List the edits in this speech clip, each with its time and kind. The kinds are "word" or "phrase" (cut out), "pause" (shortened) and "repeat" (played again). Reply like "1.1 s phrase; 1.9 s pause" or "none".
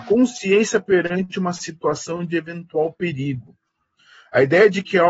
none

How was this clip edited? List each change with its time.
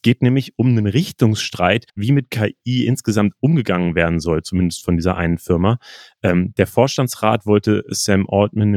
1.9 s pause

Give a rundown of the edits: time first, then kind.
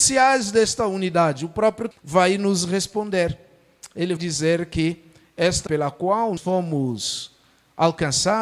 1.9 s word; 4.2 s word; 5.7 s word; 6.4 s word

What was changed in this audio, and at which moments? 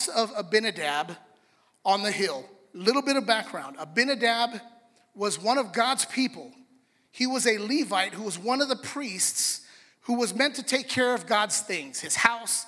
none

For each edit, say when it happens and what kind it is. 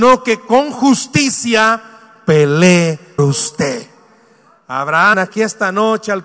3.2 s word; 5.1 s word

